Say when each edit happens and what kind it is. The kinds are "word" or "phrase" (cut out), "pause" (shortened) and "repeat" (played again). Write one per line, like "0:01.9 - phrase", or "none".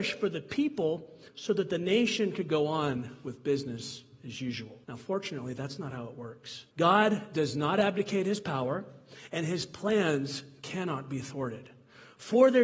0:01.3 - pause
0:04.8 - pause
0:06.7 - pause